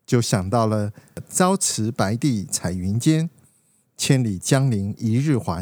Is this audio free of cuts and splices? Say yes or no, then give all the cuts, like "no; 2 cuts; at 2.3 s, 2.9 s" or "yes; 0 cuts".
yes; 0 cuts